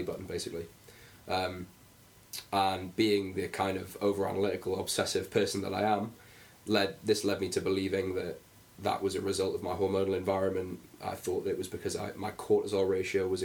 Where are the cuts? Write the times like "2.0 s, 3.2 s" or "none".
none